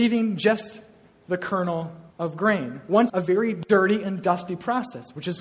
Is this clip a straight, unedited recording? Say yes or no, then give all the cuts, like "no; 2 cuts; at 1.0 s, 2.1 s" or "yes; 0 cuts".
no; 2 cuts; at 2.1 s, 3.1 s